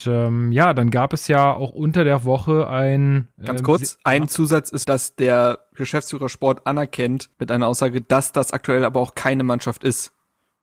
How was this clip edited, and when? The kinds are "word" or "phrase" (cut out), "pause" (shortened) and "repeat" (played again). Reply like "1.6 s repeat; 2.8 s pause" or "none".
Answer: 4.8 s word; 7.3 s pause